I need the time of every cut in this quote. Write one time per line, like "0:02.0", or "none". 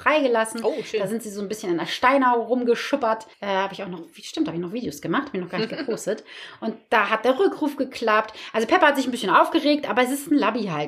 0:03.3